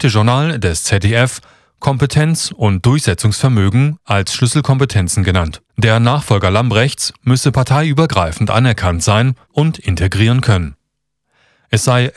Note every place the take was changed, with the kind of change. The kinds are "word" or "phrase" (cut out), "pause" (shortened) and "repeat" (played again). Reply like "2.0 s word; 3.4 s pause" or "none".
5.7 s pause